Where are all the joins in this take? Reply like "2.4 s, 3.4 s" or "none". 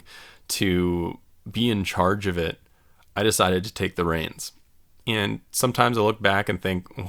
none